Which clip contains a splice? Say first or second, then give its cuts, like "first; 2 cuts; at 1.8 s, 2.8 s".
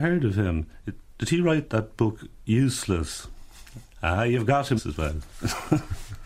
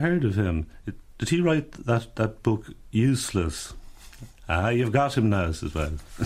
first; 2 cuts; at 1.7 s, 4.8 s